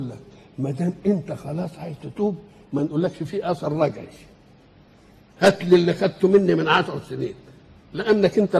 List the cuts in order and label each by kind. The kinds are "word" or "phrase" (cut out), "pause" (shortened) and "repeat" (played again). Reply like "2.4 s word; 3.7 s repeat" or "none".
none